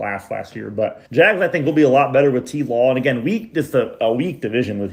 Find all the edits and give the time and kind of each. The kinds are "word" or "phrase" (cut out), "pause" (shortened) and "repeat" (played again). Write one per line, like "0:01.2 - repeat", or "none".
0:01.1 - pause